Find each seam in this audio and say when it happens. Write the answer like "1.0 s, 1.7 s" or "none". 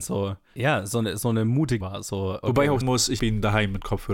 1.8 s, 2.4 s, 2.8 s, 3.2 s